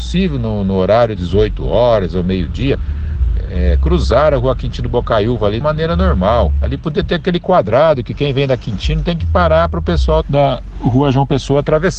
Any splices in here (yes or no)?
yes